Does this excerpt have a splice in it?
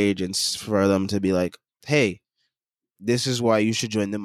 no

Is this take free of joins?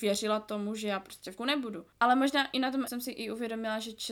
no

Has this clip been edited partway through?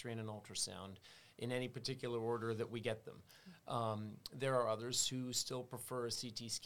no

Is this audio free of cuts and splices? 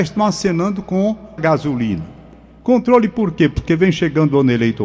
no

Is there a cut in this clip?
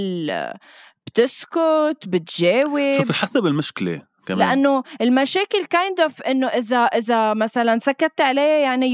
no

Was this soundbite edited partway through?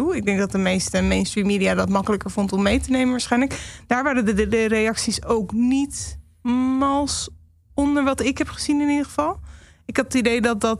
no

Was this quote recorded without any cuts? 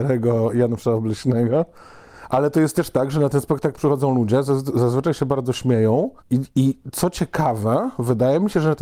no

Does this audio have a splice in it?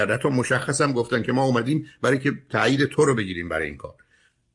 no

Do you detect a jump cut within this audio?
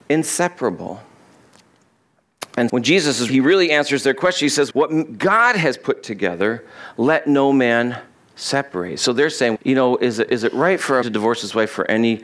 yes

